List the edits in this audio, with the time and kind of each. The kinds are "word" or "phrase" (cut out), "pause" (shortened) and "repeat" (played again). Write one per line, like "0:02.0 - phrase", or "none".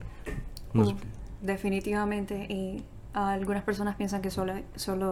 none